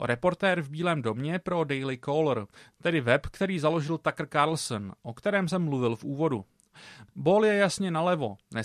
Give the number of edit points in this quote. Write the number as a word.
zero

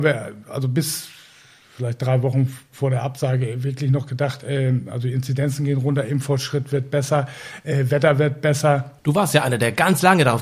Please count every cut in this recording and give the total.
one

